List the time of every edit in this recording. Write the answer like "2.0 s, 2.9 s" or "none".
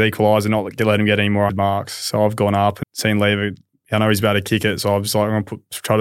1.5 s, 2.8 s

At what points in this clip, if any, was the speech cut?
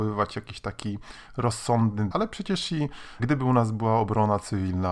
2.1 s, 3.2 s

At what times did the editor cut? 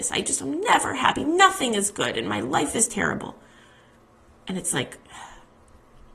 none

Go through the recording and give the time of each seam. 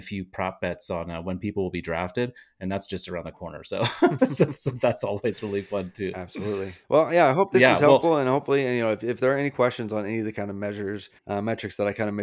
6.8 s, 11.2 s

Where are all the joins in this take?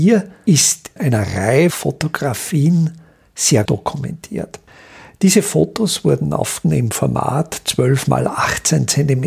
1.0 s, 1.7 s, 3.7 s, 6.6 s

